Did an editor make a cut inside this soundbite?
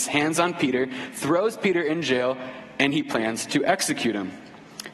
no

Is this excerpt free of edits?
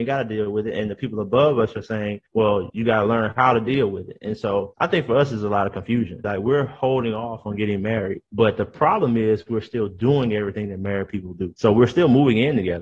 yes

